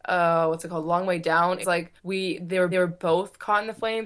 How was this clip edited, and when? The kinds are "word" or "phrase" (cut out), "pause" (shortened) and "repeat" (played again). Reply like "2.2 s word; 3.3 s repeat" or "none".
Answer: 1.6 s word; 2.0 s pause; 2.7 s repeat